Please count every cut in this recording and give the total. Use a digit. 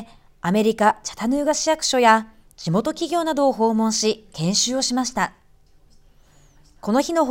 0